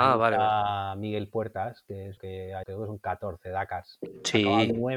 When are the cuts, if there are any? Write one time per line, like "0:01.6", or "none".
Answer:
0:02.2
0:02.6